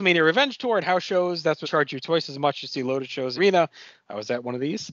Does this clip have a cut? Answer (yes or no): yes